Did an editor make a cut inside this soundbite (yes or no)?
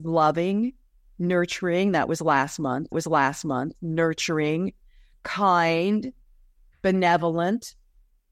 yes